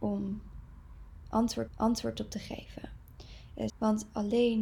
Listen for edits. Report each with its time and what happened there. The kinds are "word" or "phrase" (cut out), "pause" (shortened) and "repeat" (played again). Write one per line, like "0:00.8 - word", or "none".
0:01.7 - repeat
0:03.7 - phrase